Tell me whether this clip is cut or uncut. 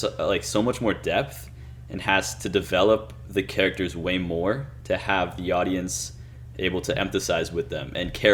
uncut